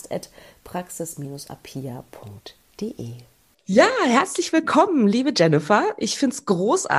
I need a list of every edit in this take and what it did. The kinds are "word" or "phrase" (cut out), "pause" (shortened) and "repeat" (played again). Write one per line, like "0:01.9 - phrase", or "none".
0:03.5 - pause